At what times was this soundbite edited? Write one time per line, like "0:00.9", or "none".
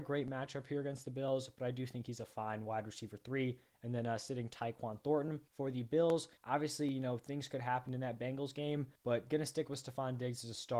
0:05.5
0:06.4
0:09.0